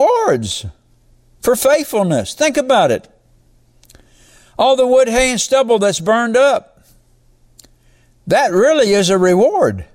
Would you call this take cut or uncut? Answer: uncut